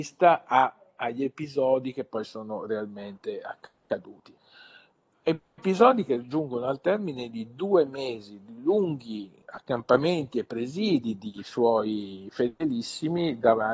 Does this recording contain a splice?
no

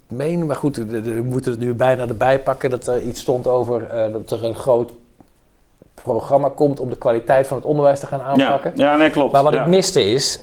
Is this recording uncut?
yes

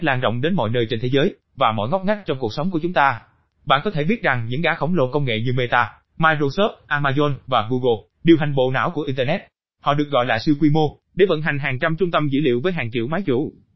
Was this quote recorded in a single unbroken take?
yes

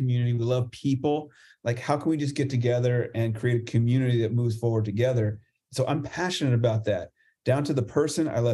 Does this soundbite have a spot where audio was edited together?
no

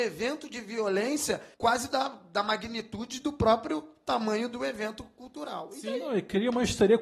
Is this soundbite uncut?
no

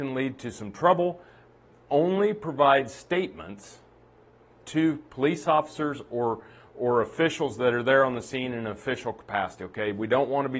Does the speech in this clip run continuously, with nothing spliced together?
yes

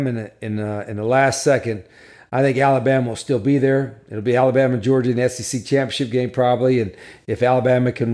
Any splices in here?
no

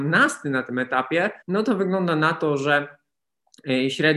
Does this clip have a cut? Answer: yes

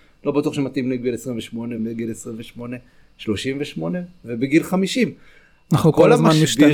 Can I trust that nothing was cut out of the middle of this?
no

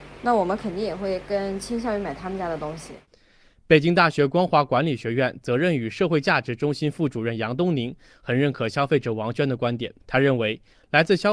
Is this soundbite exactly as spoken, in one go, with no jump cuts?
no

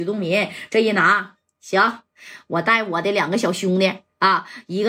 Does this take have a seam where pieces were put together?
no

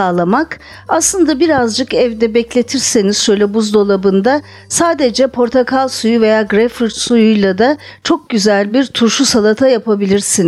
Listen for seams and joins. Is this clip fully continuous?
yes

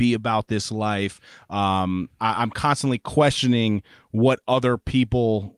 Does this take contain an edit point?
no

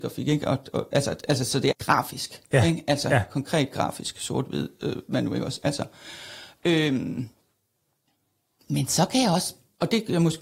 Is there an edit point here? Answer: yes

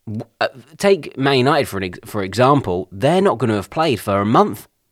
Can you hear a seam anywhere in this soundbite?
no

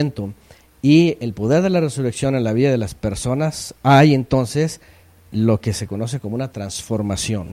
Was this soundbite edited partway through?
no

